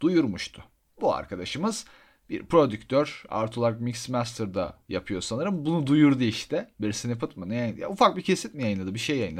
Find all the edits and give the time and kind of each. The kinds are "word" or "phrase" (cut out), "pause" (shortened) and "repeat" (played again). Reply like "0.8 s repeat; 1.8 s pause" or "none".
none